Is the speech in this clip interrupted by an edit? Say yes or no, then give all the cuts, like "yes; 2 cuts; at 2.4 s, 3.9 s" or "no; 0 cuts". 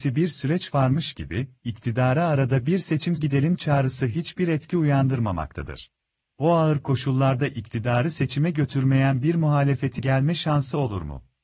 yes; 3 cuts; at 3.2 s, 6.1 s, 10.0 s